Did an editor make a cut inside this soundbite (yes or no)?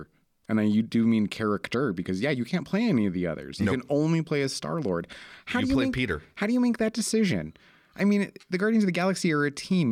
no